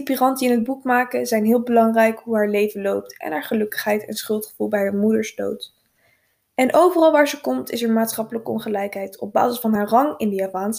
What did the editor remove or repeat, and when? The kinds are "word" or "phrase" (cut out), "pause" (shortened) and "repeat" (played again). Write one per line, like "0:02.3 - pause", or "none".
none